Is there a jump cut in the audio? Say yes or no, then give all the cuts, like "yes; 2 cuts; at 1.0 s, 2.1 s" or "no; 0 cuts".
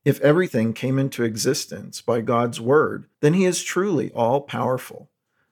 yes; 1 cut; at 3.1 s